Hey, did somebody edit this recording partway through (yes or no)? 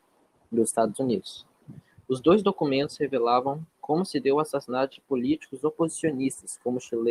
no